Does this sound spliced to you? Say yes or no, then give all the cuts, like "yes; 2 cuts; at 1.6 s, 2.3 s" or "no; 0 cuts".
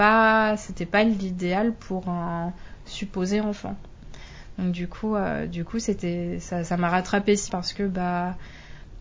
yes; 1 cut; at 7.5 s